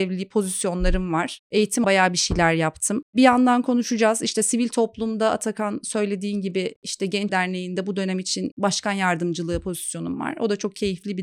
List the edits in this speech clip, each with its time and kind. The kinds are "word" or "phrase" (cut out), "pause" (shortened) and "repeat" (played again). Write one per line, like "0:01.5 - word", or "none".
0:01.8 - word
0:07.3 - phrase